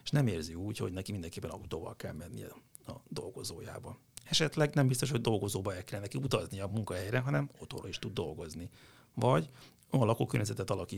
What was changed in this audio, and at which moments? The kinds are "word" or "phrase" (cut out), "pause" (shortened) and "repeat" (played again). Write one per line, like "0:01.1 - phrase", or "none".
none